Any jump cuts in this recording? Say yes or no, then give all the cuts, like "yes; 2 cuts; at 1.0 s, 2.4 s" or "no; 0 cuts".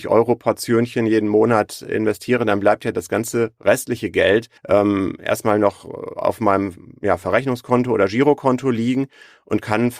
yes; 1 cut; at 4.6 s